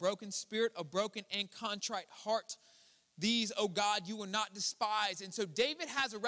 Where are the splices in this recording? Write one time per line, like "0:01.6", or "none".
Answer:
none

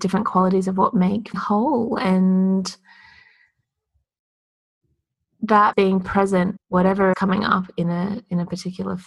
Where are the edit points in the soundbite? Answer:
0:01.3
0:05.7
0:06.6
0:07.1

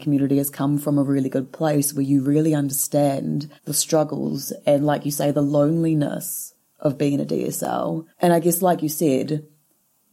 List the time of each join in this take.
0:03.6
0:08.1

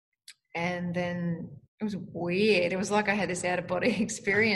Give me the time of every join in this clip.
0:01.7

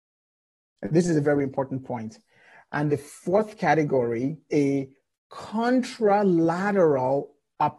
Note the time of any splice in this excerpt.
0:01.2
0:02.9
0:04.5

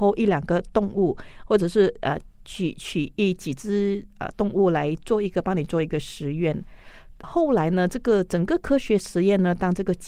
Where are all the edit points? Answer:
0:07.2

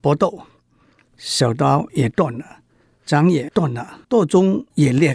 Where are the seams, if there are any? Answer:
0:04.0

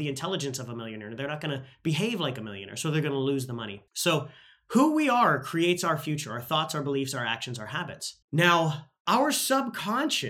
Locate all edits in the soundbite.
0:03.9
0:08.2

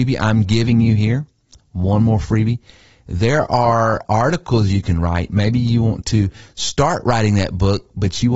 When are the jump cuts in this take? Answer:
0:04.0

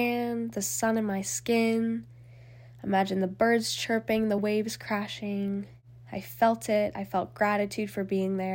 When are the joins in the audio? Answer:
none

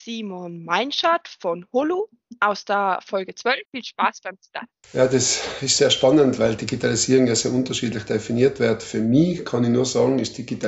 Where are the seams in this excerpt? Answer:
0:03.7

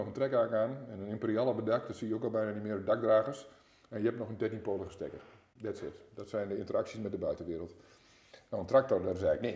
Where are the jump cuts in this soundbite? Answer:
none

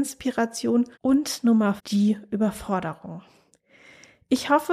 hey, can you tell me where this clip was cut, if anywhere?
0:00.9
0:01.8

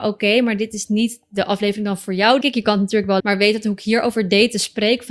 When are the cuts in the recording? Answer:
0:02.4
0:03.2

